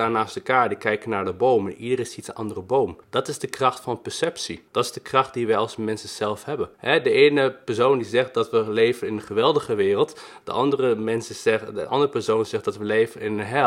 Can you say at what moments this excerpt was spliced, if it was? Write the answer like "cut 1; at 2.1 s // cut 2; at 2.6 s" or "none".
cut 1; at 3.0 s // cut 2; at 4.7 s // cut 3; at 6.7 s